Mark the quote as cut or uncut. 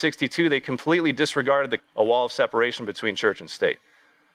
cut